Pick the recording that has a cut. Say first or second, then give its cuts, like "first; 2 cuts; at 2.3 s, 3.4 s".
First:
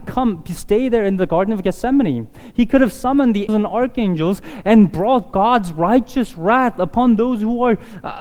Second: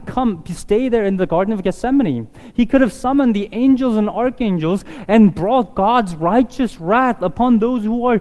first; 1 cut; at 3.5 s